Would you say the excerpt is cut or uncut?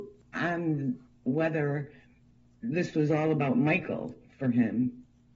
uncut